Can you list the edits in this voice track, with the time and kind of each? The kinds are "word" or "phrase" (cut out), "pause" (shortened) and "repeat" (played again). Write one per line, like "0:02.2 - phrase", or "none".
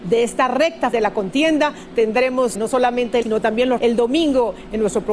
0:00.9 - word
0:02.5 - word
0:03.2 - word
0:03.8 - word